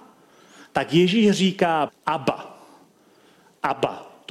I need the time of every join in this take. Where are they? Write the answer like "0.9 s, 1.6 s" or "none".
1.9 s